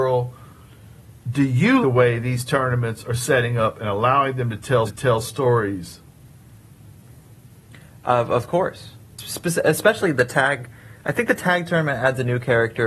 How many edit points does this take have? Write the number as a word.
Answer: three